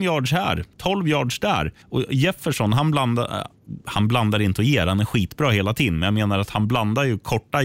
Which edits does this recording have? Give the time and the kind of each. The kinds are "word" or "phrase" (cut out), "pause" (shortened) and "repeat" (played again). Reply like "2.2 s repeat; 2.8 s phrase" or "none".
1.8 s pause